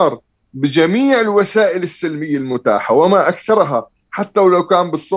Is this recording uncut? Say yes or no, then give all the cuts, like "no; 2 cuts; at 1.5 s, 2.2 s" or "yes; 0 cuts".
yes; 0 cuts